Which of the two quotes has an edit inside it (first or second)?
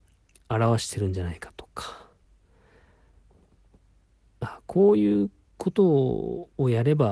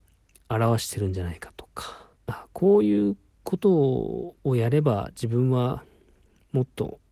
second